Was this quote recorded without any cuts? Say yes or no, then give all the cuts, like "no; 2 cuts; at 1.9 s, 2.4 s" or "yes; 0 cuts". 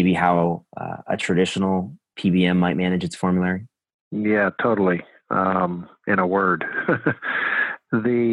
yes; 0 cuts